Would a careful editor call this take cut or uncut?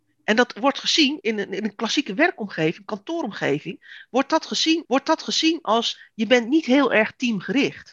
cut